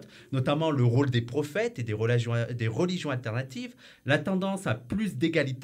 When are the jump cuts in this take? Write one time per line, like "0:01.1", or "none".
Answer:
none

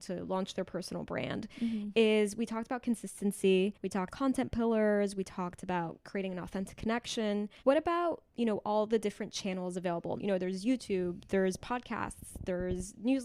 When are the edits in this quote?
0:03.7
0:04.1
0:07.6
0:10.2

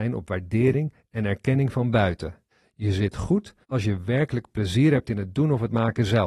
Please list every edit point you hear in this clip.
0:02.5
0:03.6

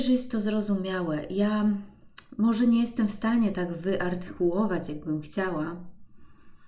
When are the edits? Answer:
0:03.5

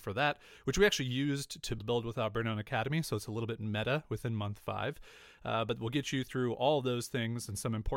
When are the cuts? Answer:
0:01.8

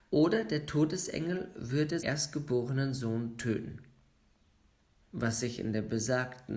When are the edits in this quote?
0:02.0

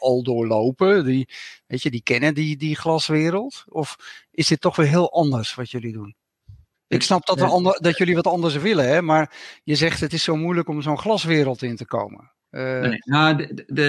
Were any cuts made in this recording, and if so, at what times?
0:06.7

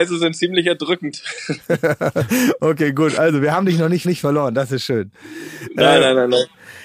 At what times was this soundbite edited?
0:04.0

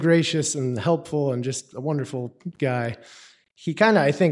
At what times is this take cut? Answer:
none

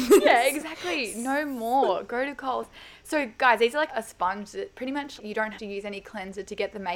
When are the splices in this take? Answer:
0:03.9
0:05.2
0:05.6

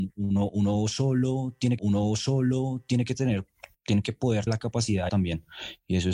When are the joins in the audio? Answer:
0:01.8
0:03.7
0:04.5
0:05.1

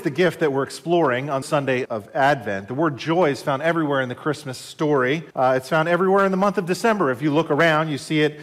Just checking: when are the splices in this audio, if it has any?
0:01.4
0:01.8
0:05.3

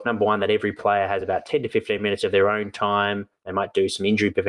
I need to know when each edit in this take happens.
none

